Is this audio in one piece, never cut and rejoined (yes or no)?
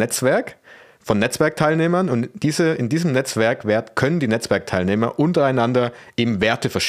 yes